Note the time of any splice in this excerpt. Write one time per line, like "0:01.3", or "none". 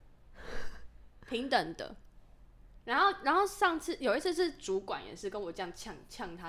0:02.8